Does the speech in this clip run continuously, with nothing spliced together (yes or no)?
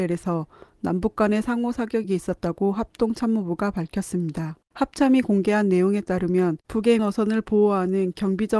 no